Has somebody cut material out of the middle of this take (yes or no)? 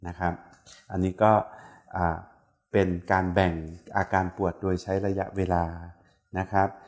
no